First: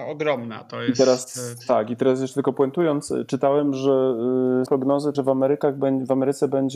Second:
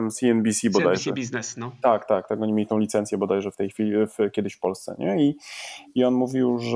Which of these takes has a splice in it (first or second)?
first